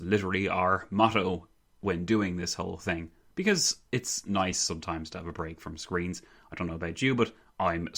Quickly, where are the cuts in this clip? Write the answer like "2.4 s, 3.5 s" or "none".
none